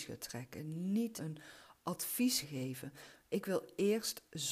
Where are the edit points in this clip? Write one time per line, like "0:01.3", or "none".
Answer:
0:01.2
0:02.4